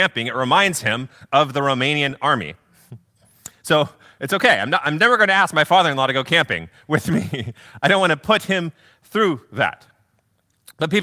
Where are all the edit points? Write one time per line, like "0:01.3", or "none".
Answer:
none